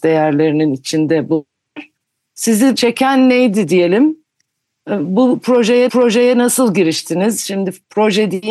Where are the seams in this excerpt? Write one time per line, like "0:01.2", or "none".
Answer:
0:02.7
0:05.9